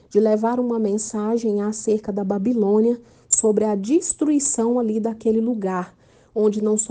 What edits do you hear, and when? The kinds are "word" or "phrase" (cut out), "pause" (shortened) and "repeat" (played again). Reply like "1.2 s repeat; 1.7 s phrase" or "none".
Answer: none